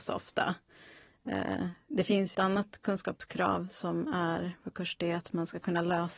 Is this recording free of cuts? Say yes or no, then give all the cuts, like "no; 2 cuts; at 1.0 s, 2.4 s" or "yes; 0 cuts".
no; 1 cut; at 2.3 s